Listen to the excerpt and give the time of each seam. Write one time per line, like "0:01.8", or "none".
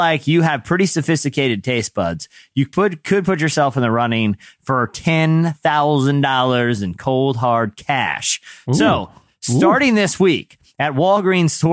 none